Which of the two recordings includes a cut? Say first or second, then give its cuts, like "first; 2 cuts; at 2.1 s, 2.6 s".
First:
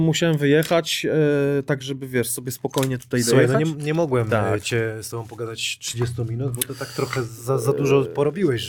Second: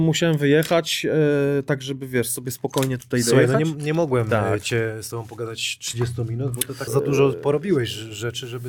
second; 1 cut; at 6.9 s